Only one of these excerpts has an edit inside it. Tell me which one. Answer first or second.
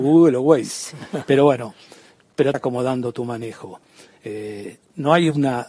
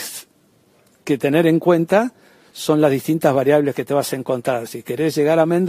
first